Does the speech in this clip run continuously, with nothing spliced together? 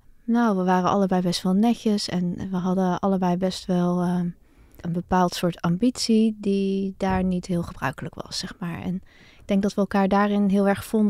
yes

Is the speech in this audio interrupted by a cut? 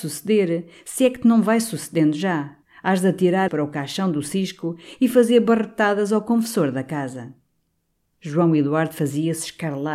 yes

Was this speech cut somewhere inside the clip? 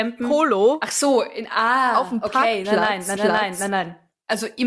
yes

